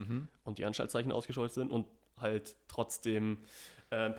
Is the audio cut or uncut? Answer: uncut